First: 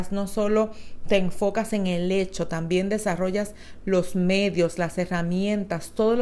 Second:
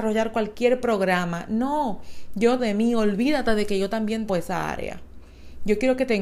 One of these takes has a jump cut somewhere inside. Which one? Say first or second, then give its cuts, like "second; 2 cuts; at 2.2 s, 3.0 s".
second; 2 cuts; at 2.6 s, 4.3 s